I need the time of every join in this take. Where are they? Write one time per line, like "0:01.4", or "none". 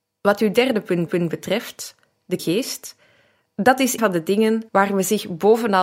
0:01.1
0:02.4
0:04.0
0:04.7